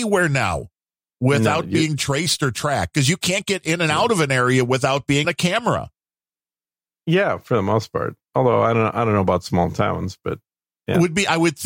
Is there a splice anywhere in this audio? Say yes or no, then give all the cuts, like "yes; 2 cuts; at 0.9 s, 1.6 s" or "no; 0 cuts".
yes; 2 cuts; at 5.2 s, 8.2 s